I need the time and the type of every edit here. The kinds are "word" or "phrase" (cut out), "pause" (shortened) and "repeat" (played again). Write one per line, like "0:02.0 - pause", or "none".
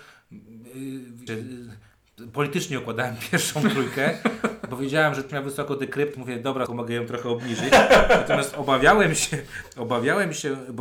0:01.3 - word
0:05.3 - word
0:06.1 - word
0:06.7 - word